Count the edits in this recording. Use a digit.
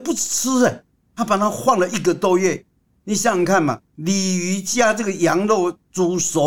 0